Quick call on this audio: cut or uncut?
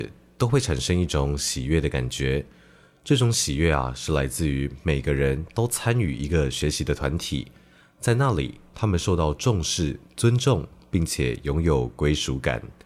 uncut